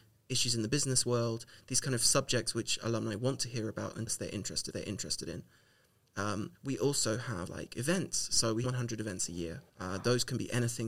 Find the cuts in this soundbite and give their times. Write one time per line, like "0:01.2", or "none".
0:04.1
0:04.7
0:06.5
0:07.5
0:08.6
0:09.7